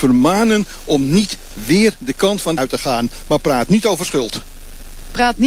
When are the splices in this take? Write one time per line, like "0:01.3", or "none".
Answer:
0:02.6